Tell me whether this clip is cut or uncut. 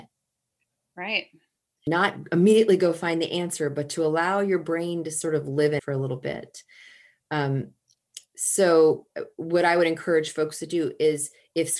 cut